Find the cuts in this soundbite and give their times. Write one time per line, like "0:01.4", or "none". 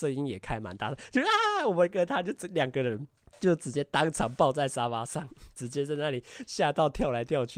0:03.2